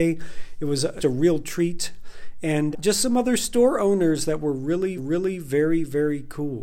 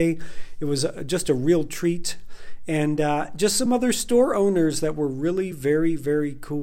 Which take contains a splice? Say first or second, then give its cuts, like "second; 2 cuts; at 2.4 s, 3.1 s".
first; 3 cuts; at 1.0 s, 2.7 s, 5.0 s